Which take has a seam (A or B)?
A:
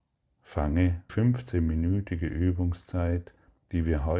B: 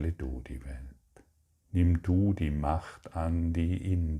A